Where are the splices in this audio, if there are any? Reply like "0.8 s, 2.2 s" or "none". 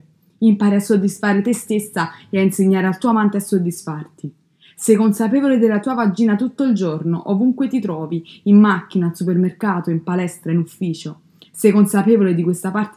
none